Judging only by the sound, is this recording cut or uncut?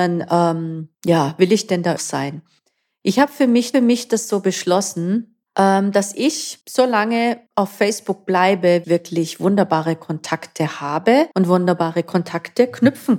cut